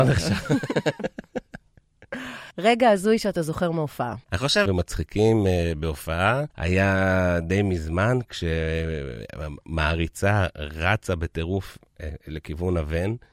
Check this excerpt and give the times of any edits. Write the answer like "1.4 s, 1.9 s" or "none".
2.5 s, 4.2 s, 4.7 s, 6.5 s